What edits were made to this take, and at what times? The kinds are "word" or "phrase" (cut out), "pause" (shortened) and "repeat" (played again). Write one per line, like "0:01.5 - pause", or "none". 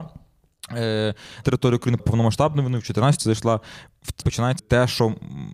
0:01.4 - word
0:02.0 - word
0:03.2 - word
0:04.2 - word
0:04.6 - word